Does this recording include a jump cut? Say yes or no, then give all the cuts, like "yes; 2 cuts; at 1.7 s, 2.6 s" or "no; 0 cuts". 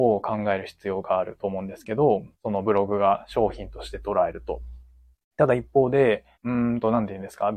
yes; 3 cuts; at 2.3 s, 5.1 s, 6.3 s